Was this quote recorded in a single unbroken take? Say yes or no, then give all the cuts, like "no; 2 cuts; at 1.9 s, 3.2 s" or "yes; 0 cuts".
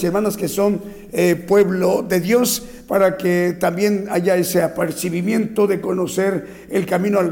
yes; 0 cuts